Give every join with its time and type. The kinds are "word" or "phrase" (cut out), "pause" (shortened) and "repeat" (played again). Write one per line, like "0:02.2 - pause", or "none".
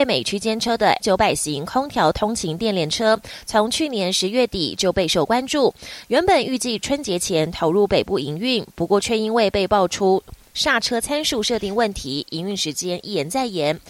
0:01.0 - word

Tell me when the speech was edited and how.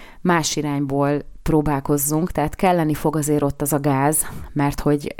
none

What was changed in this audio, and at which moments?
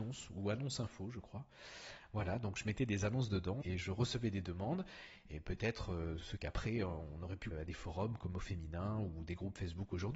0:03.6 - word
0:06.2 - word
0:07.5 - word

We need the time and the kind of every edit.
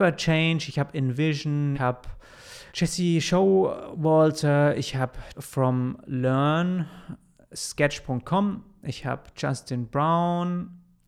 0:01.7 - word
0:02.7 - pause
0:05.3 - word

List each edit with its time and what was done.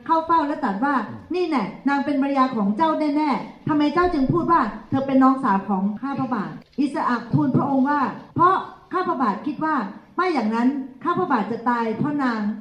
0:08.3 - pause

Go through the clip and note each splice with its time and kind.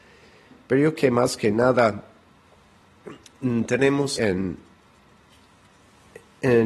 0:01.0 - word
0:04.2 - word

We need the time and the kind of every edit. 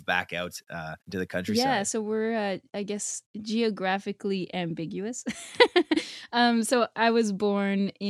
0:01.0 - pause

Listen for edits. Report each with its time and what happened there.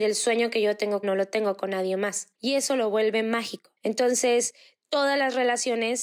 0:01.0 - word
0:02.4 - pause
0:03.8 - pause

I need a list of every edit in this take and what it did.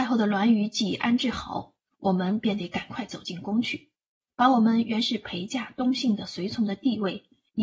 none

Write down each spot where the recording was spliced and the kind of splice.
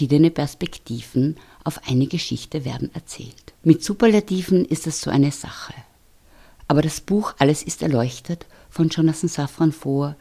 0:03.6 - pause

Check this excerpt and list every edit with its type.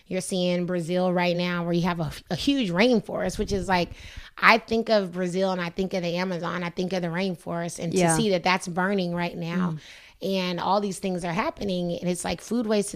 none

